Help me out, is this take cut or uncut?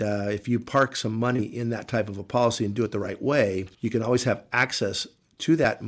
uncut